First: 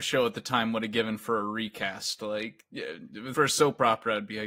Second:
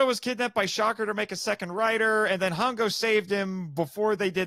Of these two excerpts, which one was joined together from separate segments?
first; 1 cut; at 3.3 s

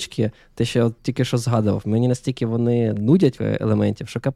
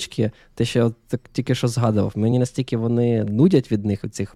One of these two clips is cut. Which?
first; 2 cuts; at 1.0 s, 3.4 s

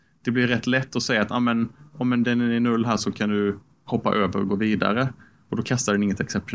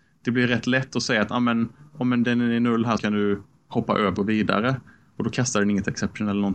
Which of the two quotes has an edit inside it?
second; 2 cuts; at 3.0 s, 4.2 s

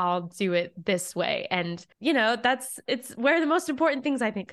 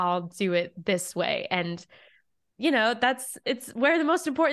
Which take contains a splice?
first; 1 cut; at 1.9 s

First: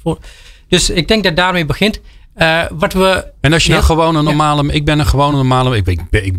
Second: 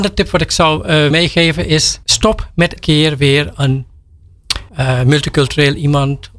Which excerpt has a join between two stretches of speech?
second; 4 cuts; at 1.1 s, 2.0 s, 2.8 s, 4.7 s

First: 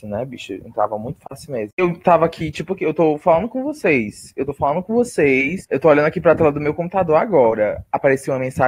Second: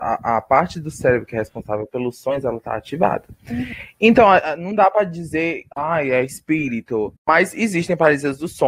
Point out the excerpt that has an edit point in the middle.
second; 2 cuts; at 5.7 s, 7.2 s

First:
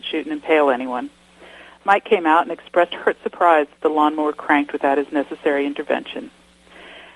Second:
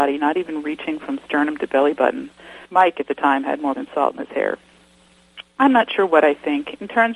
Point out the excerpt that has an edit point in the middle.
second; 2 cuts; at 2.6 s, 3.8 s

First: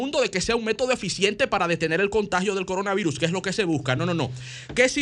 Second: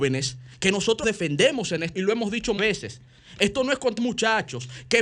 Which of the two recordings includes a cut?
second; 4 cuts; at 1.0 s, 1.9 s, 2.6 s, 4.0 s

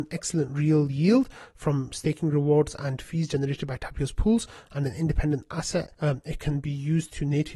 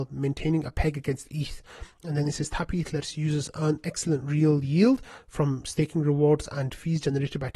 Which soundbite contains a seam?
first; 1 cut; at 5.9 s

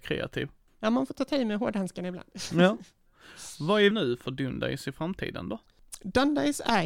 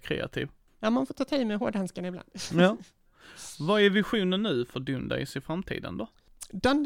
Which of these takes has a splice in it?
first; 1 cut; at 3.9 s

